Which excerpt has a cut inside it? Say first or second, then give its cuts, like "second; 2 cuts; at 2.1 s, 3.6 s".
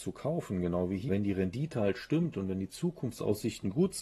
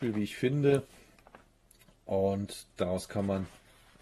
first; 1 cut; at 1.1 s